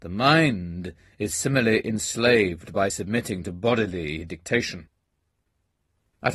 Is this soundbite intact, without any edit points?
yes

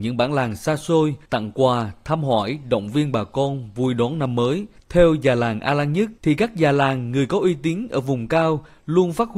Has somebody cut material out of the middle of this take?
yes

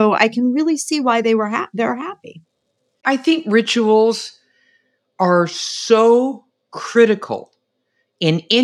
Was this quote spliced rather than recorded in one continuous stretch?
no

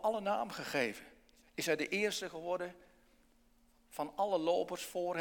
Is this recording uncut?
yes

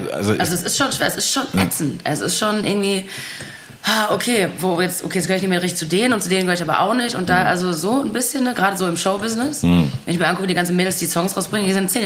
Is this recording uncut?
yes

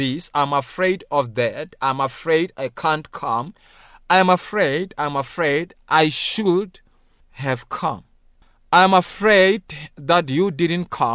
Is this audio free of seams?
yes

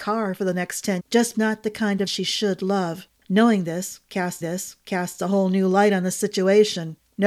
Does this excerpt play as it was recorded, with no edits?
no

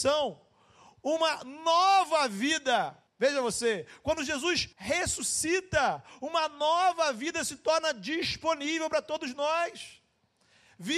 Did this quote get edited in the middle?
yes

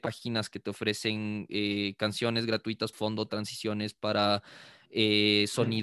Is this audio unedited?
no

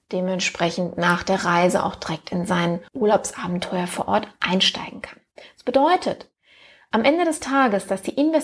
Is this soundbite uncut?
no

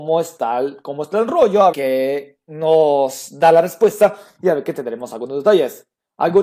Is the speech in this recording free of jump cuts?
no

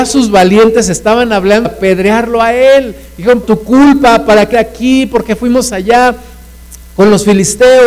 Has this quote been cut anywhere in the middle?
yes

